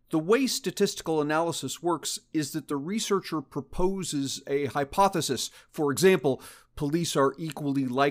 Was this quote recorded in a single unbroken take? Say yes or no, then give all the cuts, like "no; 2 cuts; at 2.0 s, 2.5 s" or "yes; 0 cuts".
yes; 0 cuts